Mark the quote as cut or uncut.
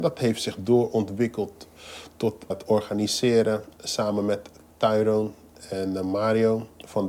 cut